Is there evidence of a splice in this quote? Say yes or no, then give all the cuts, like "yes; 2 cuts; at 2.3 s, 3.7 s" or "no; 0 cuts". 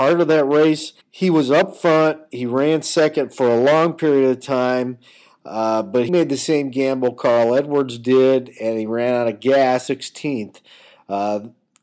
yes; 3 cuts; at 1.0 s, 6.1 s, 9.9 s